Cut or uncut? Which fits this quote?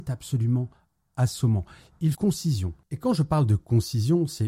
cut